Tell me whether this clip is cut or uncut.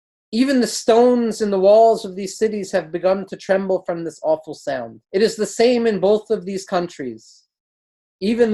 cut